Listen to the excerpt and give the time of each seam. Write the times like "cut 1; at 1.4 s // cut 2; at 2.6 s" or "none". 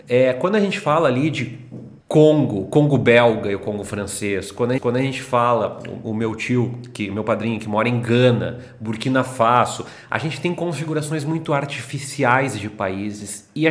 cut 1; at 2.0 s // cut 2; at 4.8 s // cut 3; at 6.0 s